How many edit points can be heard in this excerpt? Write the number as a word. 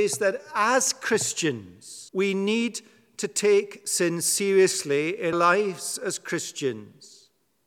two